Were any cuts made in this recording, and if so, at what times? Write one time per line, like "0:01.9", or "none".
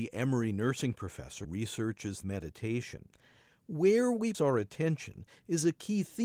0:01.4
0:02.2
0:04.3